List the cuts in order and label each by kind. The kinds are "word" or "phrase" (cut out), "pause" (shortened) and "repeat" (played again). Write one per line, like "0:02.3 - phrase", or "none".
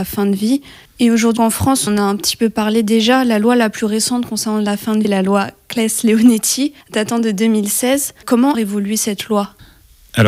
0:01.4 - word
0:01.9 - word
0:05.0 - word
0:06.8 - pause
0:08.5 - phrase